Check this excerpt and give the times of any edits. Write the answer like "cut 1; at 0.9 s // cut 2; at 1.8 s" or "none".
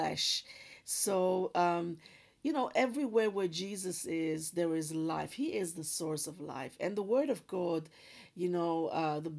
none